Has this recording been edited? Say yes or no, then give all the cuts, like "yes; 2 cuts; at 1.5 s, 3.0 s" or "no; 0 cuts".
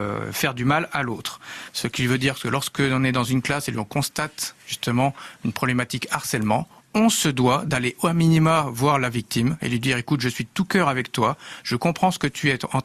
yes; 1 cut; at 4.6 s